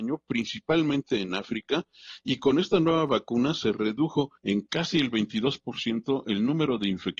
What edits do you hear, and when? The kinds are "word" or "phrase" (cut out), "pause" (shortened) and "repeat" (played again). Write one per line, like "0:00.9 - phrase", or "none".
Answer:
0:04.4 - pause